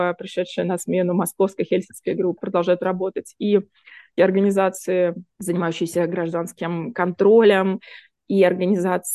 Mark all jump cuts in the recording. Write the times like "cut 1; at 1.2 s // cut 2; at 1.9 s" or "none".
cut 1; at 2.4 s // cut 2; at 4.2 s // cut 3; at 5.3 s

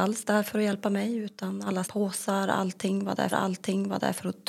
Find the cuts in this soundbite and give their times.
cut 1; at 1.8 s // cut 2; at 3.3 s

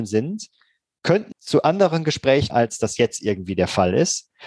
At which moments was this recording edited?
cut 1; at 1.3 s // cut 2; at 2.5 s

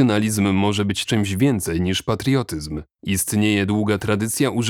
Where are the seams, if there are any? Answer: cut 1; at 1.0 s // cut 2; at 2.9 s

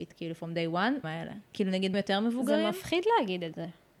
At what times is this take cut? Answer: cut 1; at 1.0 s // cut 2; at 1.9 s

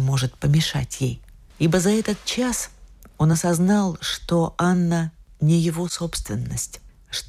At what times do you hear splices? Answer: none

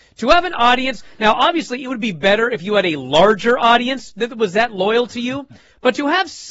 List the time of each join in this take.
none

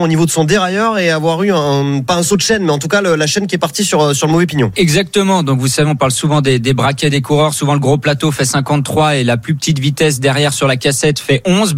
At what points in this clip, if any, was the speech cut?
none

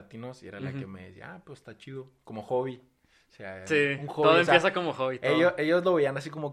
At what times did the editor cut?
none

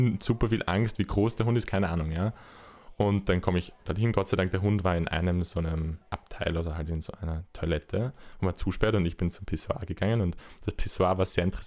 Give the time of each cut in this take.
cut 1; at 6.1 s

